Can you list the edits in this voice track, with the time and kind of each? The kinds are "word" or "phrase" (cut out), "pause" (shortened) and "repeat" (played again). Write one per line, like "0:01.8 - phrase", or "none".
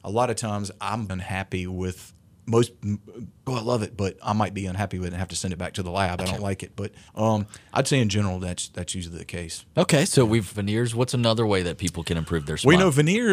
0:01.1 - word
0:03.5 - phrase
0:06.2 - word
0:07.1 - pause
0:09.7 - pause
0:10.5 - phrase